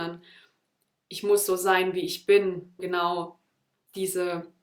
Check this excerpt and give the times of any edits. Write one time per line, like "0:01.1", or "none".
0:02.8